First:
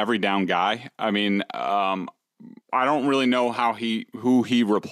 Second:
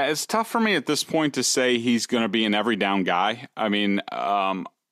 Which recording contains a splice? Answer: first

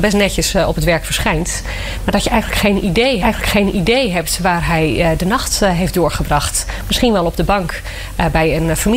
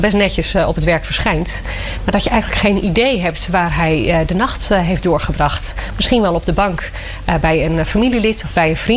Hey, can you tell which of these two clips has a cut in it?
first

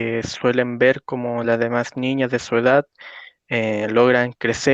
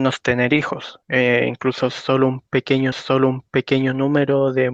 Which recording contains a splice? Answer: second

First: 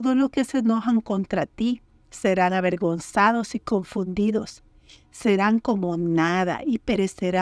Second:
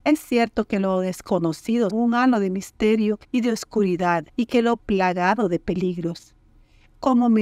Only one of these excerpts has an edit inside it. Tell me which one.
second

